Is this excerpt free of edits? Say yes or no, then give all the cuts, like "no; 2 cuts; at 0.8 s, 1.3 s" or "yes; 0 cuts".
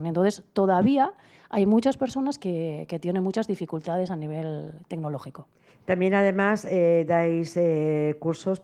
yes; 0 cuts